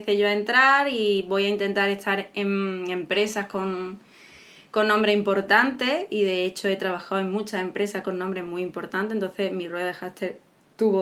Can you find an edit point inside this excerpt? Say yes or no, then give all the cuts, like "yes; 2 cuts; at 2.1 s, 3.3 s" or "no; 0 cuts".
no; 0 cuts